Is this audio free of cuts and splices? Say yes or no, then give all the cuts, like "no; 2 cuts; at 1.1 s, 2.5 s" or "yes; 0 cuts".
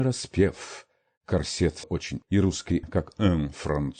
no; 3 cuts; at 1.8 s, 2.2 s, 2.8 s